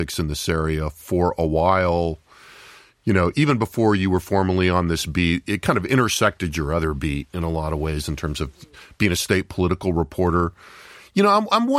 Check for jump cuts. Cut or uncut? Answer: uncut